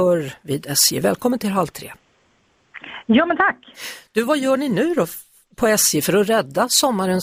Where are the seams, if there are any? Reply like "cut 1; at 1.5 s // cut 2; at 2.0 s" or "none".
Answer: none